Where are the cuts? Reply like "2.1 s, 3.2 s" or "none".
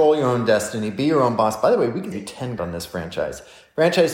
2.1 s, 2.6 s